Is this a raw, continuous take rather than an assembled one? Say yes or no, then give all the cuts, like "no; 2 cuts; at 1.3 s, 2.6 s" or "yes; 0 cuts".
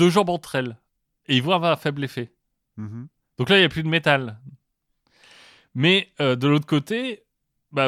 yes; 0 cuts